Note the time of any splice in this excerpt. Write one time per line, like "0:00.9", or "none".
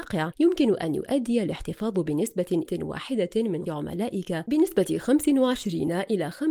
0:02.7
0:03.7
0:04.5